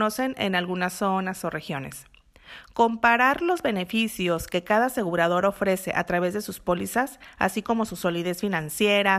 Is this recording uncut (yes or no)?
yes